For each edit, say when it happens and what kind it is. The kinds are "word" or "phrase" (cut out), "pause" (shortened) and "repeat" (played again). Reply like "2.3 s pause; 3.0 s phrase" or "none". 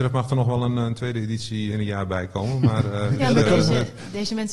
1.7 s word